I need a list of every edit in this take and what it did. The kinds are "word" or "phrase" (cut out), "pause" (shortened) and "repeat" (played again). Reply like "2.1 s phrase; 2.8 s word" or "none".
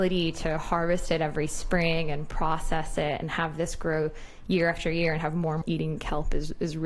5.6 s phrase